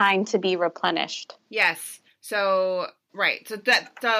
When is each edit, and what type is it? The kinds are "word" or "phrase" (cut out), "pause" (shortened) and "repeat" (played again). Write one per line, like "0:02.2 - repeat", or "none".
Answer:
0:01.4 - pause